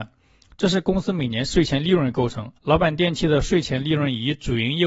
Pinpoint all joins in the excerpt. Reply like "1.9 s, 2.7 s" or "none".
2.6 s